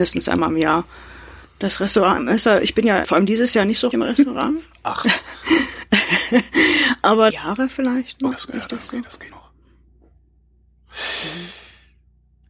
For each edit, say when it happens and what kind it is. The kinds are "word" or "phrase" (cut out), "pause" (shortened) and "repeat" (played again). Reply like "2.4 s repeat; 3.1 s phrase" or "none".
1.4 s pause; 3.0 s word; 3.9 s word; 7.3 s phrase; 8.3 s word; 9.3 s word